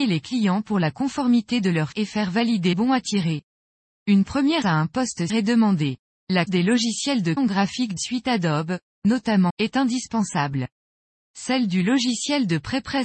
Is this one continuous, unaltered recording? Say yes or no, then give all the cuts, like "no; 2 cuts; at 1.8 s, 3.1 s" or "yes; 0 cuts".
no; 8 cuts; at 1.9 s, 2.7 s, 4.6 s, 5.3 s, 6.5 s, 7.4 s, 8.0 s, 9.5 s